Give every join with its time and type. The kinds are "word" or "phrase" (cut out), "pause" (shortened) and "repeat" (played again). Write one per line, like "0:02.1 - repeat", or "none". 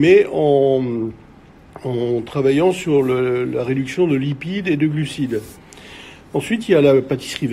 none